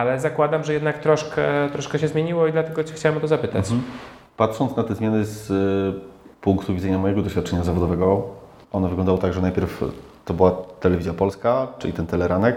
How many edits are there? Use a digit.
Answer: 0